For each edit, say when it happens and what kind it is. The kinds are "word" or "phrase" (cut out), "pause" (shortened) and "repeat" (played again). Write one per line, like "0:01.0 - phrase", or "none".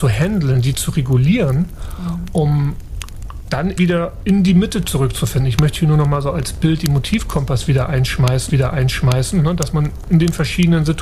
0:03.8 - word
0:08.5 - repeat